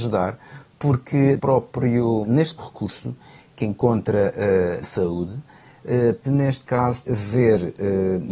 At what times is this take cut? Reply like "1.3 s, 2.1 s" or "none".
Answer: 1.4 s, 2.2 s, 2.6 s, 4.8 s, 6.2 s, 7.0 s